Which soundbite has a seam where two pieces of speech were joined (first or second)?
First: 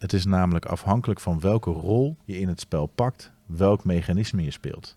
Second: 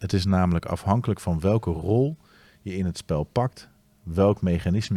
first